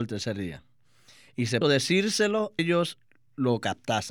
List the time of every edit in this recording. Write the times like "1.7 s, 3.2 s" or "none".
1.6 s, 2.6 s

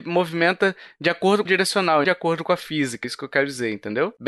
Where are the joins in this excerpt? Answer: 1.5 s, 2.0 s, 3.0 s

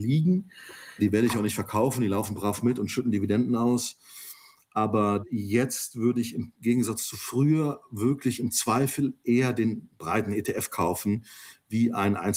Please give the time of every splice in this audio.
none

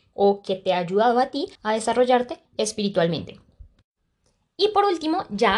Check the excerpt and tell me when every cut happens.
1.5 s, 2.5 s

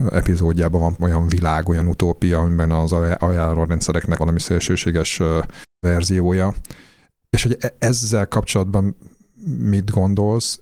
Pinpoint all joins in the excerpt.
1.0 s, 4.2 s

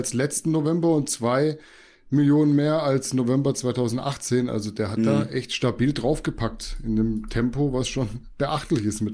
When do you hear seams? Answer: none

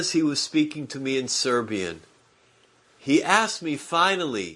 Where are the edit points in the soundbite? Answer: none

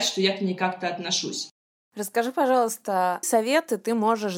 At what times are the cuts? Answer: 3.2 s

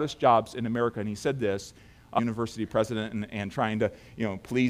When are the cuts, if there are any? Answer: none

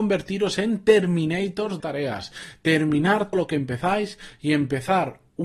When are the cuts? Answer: 1.8 s, 3.3 s

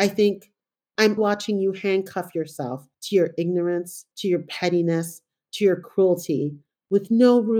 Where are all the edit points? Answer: 1.2 s, 2.9 s, 4.1 s

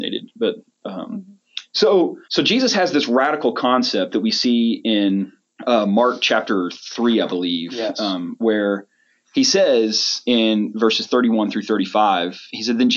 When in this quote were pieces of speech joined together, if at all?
2.2 s

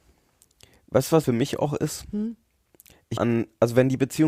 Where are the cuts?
1.2 s, 3.2 s

